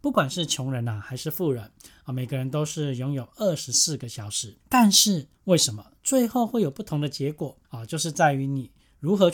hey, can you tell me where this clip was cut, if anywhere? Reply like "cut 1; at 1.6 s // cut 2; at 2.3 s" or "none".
cut 1; at 4.6 s // cut 2; at 5.3 s // cut 3; at 7.6 s